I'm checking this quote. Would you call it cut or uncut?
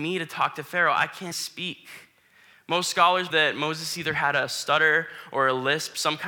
cut